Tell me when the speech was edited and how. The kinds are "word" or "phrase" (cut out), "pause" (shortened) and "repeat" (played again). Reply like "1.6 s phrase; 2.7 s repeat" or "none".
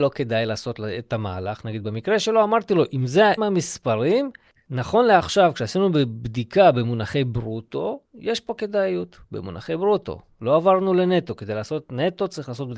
3.4 s phrase; 8.0 s pause

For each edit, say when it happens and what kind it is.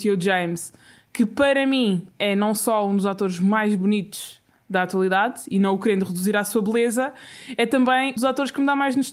8.2 s word

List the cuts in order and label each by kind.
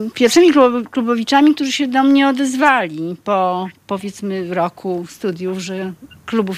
3.8 s pause

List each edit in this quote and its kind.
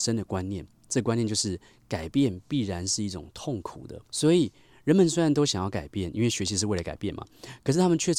4.0 s pause

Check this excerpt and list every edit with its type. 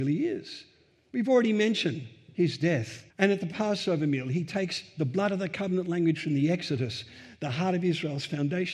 3.1 s pause

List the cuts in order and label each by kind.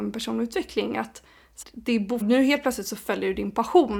1.6 s word; 2.2 s word

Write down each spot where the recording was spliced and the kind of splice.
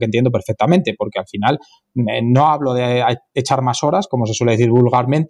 none

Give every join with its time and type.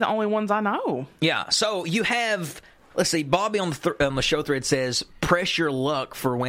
none

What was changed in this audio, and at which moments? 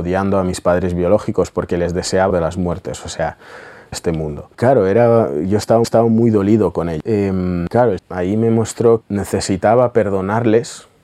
2.3 s phrase; 3.9 s phrase; 4.5 s pause; 5.8 s repeat; 7.0 s word; 8.0 s word; 9.0 s word

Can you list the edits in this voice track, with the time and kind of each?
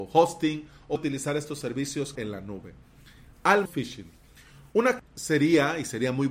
1.0 s word; 2.2 s word; 3.7 s word; 5.0 s word

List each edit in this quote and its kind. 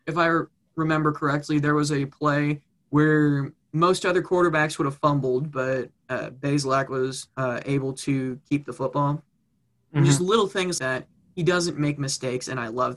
3.6 s word; 7.3 s pause; 10.8 s word

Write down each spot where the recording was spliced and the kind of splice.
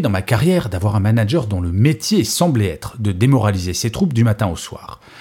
none

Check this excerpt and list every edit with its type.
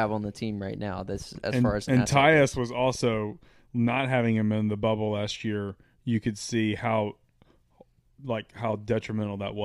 none

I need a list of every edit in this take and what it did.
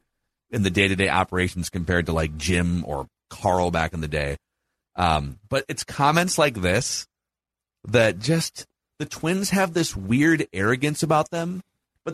none

